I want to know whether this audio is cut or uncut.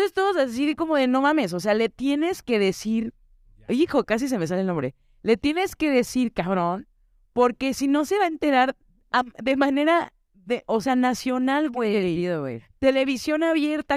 uncut